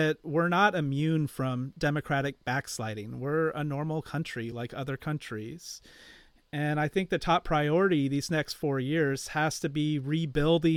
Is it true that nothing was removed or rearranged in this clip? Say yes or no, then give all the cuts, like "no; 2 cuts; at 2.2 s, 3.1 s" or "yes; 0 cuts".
yes; 0 cuts